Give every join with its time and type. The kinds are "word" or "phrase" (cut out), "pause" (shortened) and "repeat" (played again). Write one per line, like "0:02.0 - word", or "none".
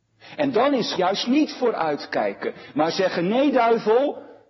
0:01.0 - word